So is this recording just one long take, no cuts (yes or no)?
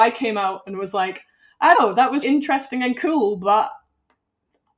no